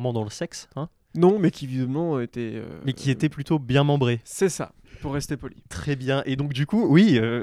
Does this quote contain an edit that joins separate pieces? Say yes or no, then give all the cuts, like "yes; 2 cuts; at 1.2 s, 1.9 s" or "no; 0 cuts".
no; 0 cuts